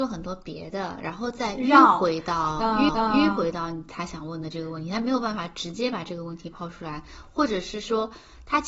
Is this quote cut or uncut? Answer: cut